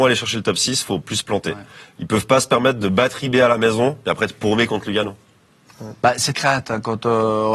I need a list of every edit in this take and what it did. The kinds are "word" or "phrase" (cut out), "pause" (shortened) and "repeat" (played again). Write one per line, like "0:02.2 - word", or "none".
0:06.3 - word